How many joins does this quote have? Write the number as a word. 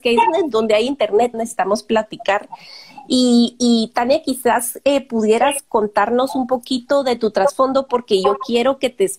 one